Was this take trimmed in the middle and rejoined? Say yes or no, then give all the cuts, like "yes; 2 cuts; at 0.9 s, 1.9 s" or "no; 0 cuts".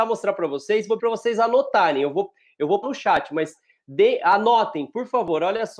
yes; 2 cuts; at 1.0 s, 2.8 s